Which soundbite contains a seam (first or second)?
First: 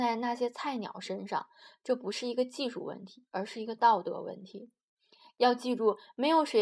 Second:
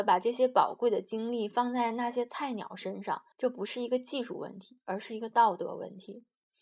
second